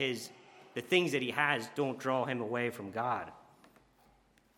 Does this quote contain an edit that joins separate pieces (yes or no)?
no